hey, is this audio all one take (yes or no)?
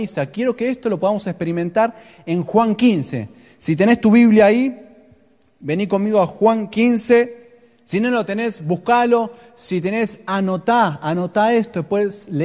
yes